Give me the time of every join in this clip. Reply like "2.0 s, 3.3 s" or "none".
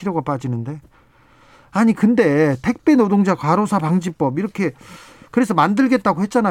none